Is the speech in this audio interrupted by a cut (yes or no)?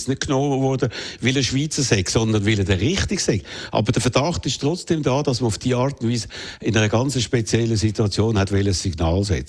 no